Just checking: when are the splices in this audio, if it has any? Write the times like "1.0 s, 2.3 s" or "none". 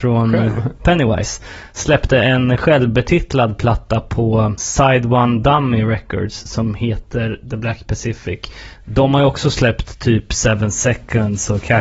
none